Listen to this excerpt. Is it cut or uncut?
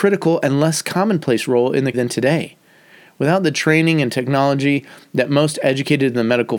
cut